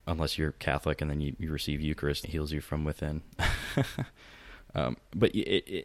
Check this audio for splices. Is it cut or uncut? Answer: cut